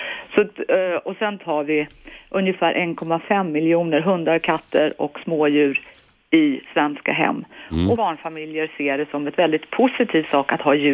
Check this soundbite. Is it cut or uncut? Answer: cut